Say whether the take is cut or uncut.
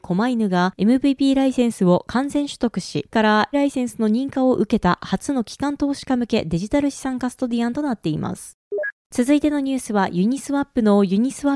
cut